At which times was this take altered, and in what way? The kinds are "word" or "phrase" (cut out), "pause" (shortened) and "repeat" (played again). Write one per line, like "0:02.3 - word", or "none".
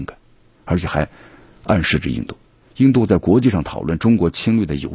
none